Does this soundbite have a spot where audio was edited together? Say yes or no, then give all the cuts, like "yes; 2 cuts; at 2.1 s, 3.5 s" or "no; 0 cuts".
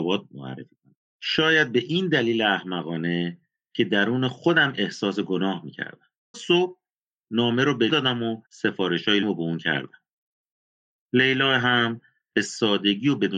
yes; 4 cuts; at 6.3 s, 7.9 s, 8.4 s, 9.2 s